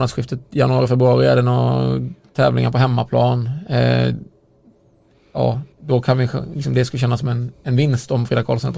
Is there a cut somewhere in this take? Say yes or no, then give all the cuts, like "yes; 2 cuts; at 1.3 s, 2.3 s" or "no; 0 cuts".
yes; 1 cut; at 5.7 s